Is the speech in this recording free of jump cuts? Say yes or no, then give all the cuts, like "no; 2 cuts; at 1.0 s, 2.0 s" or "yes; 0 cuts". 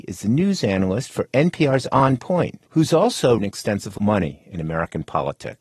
no; 3 cuts; at 2.7 s, 3.4 s, 4.0 s